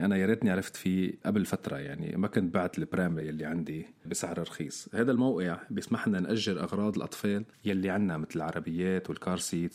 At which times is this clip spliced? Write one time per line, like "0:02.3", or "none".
none